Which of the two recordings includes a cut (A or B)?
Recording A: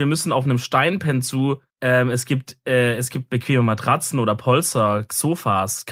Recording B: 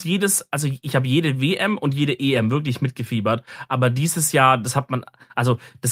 A